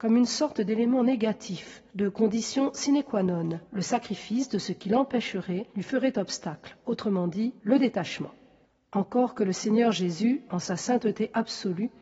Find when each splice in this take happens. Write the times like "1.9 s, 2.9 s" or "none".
1.9 s, 3.6 s, 5.7 s, 7.6 s, 8.6 s